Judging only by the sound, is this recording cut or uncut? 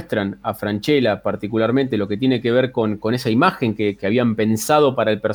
uncut